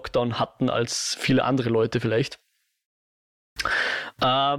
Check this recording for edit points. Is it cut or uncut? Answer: uncut